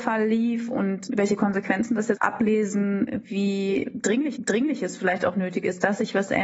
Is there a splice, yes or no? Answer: yes